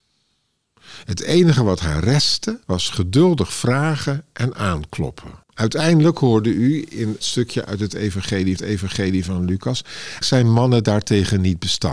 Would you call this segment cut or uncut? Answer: cut